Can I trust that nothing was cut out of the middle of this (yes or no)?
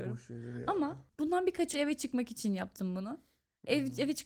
no